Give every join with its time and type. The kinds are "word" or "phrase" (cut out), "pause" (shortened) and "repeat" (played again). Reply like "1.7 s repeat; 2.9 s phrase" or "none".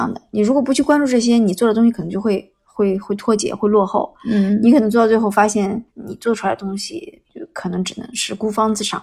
5.9 s pause; 7.2 s pause